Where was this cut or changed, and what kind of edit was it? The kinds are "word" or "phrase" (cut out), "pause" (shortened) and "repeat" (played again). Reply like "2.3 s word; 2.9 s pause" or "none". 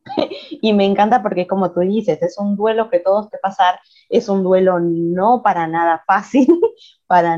3.3 s word